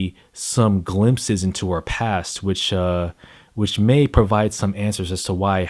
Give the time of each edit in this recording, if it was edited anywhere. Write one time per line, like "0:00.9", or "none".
none